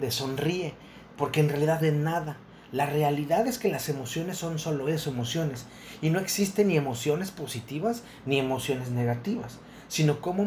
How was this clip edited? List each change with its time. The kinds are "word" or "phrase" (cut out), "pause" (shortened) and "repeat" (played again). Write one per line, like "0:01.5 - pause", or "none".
0:01.1 - word
0:01.8 - phrase

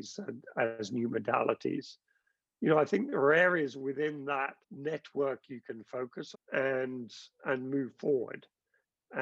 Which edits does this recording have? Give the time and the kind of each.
0:04.6 - pause
0:06.3 - word

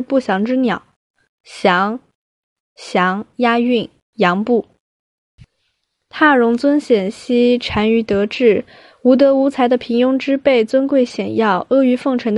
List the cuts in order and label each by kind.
none

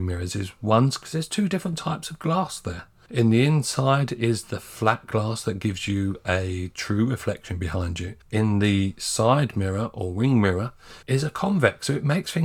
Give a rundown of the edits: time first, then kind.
0:08.2 - pause
0:11.0 - pause

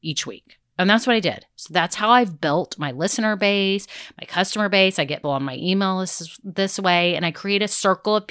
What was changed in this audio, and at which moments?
0:05.2 - word

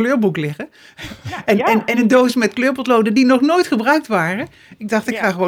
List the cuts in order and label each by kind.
none

